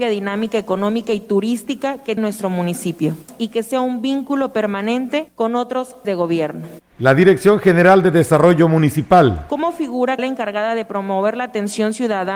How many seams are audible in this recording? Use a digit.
3